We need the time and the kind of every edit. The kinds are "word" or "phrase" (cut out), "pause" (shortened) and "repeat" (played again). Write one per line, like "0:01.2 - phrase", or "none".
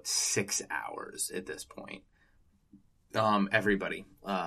none